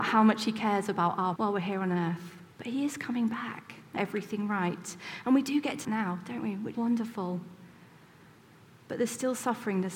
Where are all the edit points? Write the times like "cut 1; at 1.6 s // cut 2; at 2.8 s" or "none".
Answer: cut 1; at 1.4 s // cut 2; at 2.5 s // cut 3; at 4.0 s // cut 4; at 5.8 s // cut 5; at 6.7 s